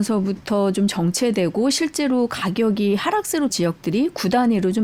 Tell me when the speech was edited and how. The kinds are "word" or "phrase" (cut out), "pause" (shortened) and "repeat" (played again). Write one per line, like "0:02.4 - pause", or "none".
0:03.5 - word